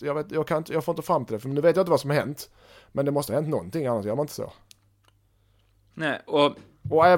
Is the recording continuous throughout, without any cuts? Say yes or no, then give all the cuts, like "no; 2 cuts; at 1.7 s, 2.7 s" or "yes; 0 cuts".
yes; 0 cuts